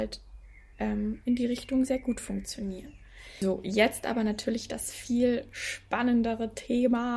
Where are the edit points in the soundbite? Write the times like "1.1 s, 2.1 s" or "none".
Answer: 1.9 s